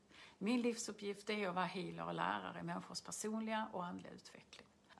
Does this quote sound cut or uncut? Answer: uncut